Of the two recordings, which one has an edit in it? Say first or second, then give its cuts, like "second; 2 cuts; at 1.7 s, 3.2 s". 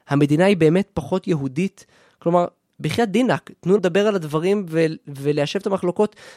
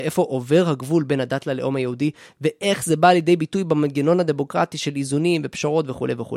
first; 1 cut; at 3.8 s